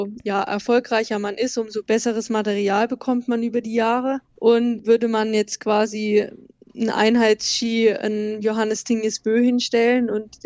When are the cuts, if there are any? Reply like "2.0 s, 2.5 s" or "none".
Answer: 4.3 s